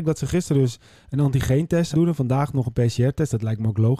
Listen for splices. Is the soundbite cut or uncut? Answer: cut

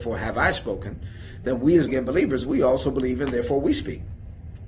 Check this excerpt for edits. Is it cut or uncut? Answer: cut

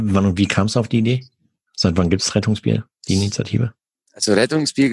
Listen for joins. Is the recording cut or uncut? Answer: uncut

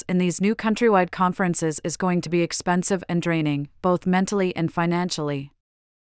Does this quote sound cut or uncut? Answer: uncut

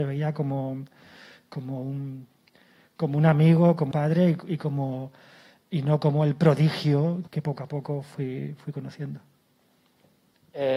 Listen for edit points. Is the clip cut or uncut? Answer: cut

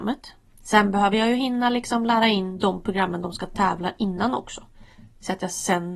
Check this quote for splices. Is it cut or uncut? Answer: uncut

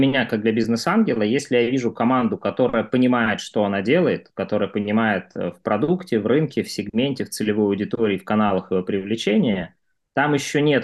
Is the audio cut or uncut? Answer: uncut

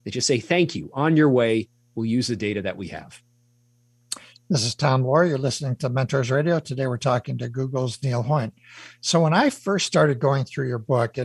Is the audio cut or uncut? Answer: uncut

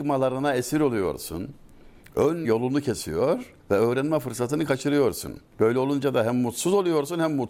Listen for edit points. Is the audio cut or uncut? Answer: cut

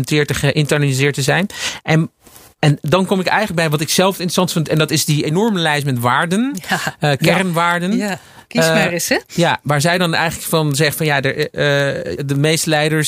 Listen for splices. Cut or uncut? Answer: cut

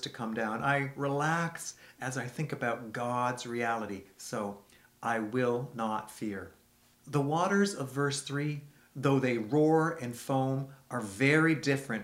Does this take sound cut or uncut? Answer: uncut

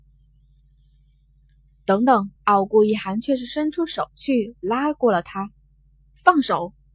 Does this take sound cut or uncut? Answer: cut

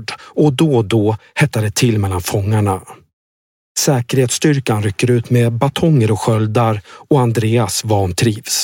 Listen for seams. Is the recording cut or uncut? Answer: uncut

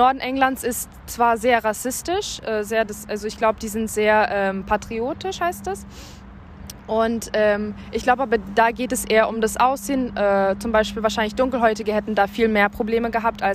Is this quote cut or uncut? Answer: uncut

